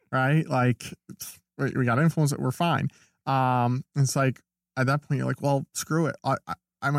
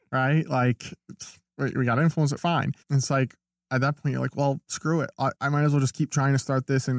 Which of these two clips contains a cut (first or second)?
second